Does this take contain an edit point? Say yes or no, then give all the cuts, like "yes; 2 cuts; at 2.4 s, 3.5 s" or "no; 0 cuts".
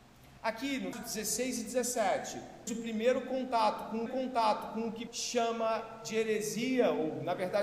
yes; 4 cuts; at 0.9 s, 2.7 s, 4.1 s, 5.1 s